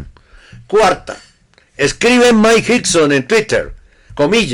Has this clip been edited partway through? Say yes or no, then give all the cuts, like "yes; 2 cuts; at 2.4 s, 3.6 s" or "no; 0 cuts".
no; 0 cuts